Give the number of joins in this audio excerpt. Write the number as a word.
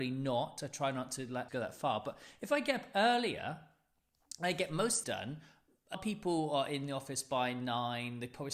three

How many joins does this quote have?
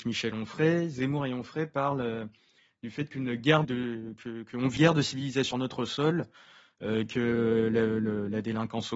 three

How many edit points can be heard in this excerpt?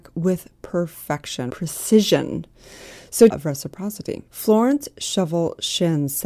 three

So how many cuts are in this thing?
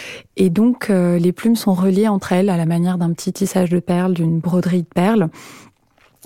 zero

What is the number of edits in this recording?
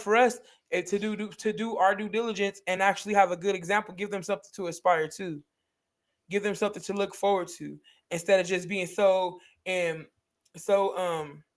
zero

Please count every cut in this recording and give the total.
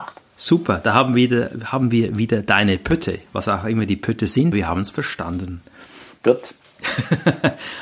one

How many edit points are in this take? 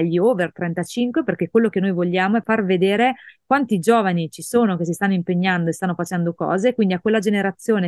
one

